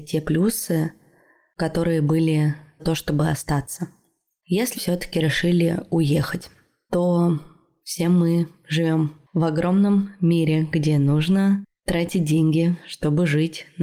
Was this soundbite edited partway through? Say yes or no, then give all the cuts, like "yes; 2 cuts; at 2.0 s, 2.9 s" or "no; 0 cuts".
yes; 2 cuts; at 2.8 s, 4.7 s